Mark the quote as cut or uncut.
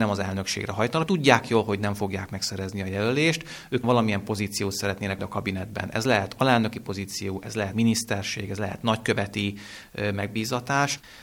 cut